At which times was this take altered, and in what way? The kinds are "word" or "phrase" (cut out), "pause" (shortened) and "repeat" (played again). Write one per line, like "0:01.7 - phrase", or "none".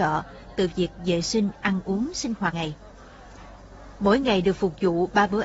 0:02.5 - word